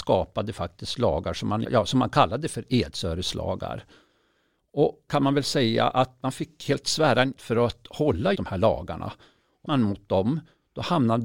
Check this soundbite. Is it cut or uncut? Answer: cut